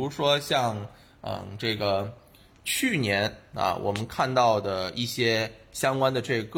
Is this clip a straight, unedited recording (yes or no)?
yes